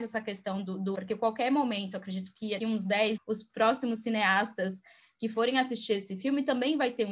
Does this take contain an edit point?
yes; 3 cuts; at 0.9 s, 2.6 s, 3.2 s

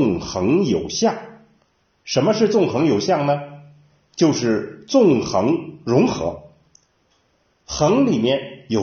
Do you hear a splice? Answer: no; 0 cuts

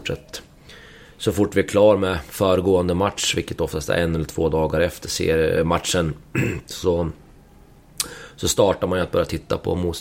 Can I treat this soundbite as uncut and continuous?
yes; 0 cuts

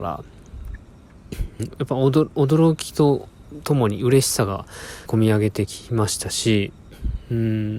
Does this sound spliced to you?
yes; 2 cuts; at 1.6 s, 5.1 s

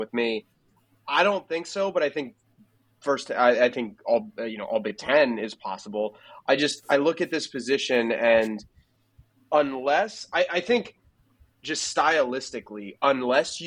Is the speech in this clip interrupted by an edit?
no; 0 cuts

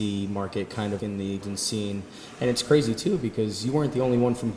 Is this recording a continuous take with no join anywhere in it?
no; 2 cuts; at 1.0 s, 1.4 s

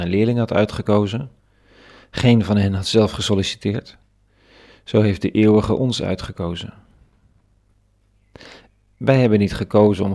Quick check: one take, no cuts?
yes; 0 cuts

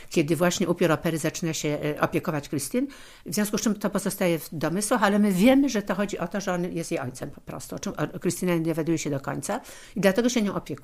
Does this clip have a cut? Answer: no; 0 cuts

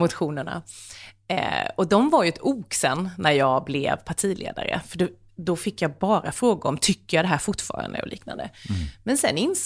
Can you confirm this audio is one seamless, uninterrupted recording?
yes; 0 cuts

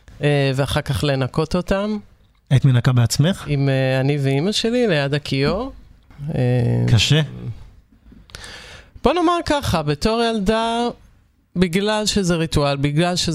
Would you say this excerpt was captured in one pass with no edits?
yes; 0 cuts

